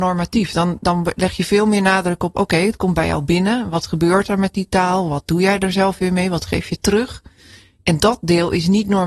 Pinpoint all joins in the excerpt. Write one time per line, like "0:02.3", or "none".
none